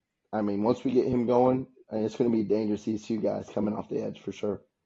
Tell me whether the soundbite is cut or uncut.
uncut